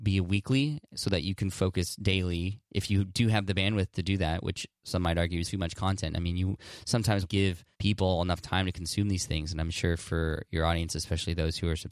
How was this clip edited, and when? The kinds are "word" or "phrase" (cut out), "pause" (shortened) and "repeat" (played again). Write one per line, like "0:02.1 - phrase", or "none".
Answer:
0:04.8 - pause
0:05.4 - word
0:07.2 - word
0:07.7 - pause

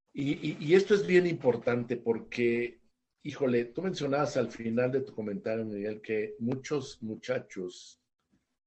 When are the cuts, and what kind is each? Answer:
none

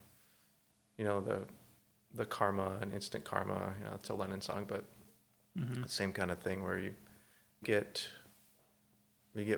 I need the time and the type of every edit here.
0:07.6 - word

